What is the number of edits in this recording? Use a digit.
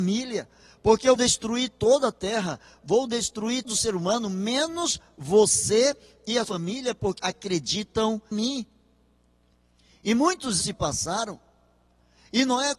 6